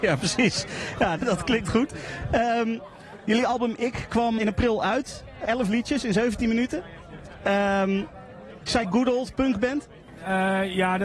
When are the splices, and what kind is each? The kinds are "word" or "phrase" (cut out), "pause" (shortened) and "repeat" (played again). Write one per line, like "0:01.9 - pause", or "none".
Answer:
0:01.2 - word
0:04.4 - word
0:05.4 - word
0:08.8 - word

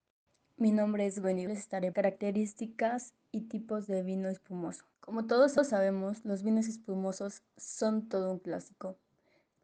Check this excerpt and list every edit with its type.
0:01.5 - phrase
0:01.9 - phrase
0:03.2 - word
0:04.9 - pause

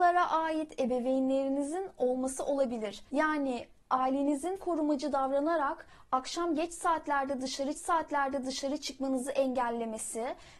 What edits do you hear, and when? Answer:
0:03.1 - pause
0:04.6 - word
0:07.7 - repeat

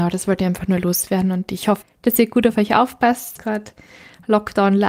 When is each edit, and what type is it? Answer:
0:01.8 - word
0:03.4 - word

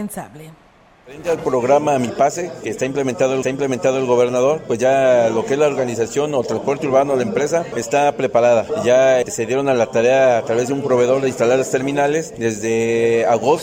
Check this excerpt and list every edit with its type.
0:03.4 - repeat

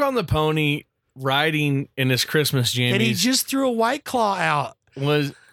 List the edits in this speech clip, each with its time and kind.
none

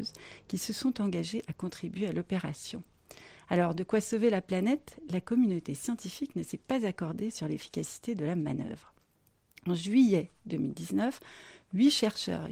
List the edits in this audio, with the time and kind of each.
none

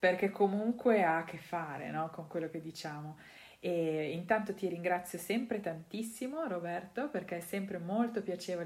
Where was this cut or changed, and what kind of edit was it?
none

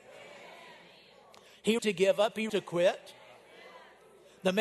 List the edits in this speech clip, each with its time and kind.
0:01.8 - word
0:02.5 - word

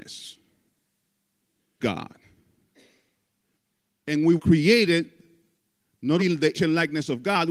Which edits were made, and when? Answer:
0:01.8 - word
0:04.4 - word
0:06.2 - word
0:06.5 - word

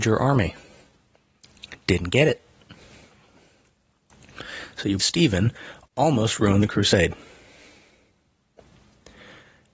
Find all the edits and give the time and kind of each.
0:05.0 - word

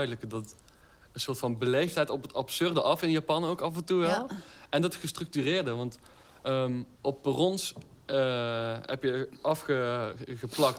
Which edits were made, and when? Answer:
0:06.9 - pause

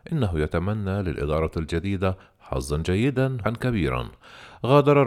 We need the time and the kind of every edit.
0:03.4 - word

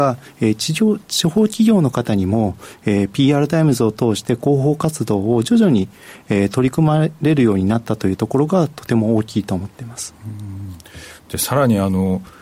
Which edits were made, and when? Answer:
none

